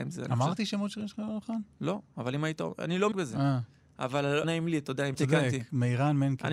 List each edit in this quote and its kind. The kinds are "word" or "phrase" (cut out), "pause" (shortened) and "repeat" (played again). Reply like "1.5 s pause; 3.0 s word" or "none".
1.7 s pause; 3.1 s word; 4.4 s word; 5.1 s phrase